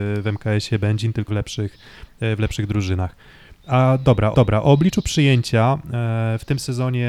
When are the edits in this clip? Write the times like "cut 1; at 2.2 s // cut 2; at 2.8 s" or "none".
cut 1; at 1.3 s // cut 2; at 4.3 s